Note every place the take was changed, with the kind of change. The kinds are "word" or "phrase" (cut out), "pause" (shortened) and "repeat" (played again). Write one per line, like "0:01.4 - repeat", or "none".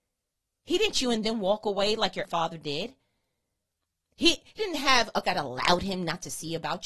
0:00.9 - word
0:02.2 - word
0:04.6 - word
0:05.2 - word

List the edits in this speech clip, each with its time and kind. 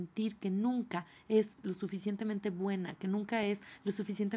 none

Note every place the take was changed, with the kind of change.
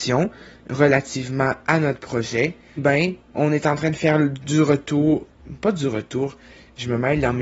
0:02.8 - word

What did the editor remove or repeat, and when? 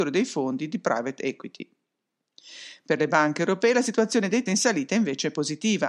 0:04.5 - word

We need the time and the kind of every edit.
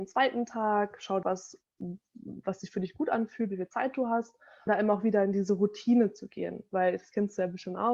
0:01.2 - word
0:04.7 - word

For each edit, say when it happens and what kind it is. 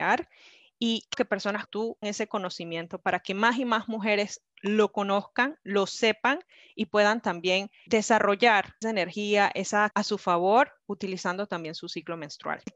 0:01.1 - word
0:01.7 - word
0:02.0 - word
0:07.9 - word
0:08.8 - word
0:09.9 - word

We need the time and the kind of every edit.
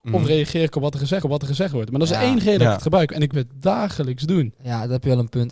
0:01.2 - repeat
0:03.3 - word

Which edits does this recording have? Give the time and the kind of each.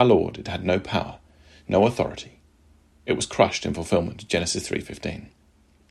none

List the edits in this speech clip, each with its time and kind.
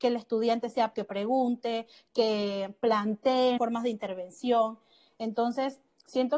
0:00.9 - word
0:03.6 - word

